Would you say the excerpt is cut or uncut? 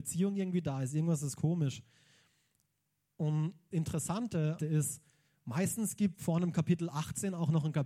cut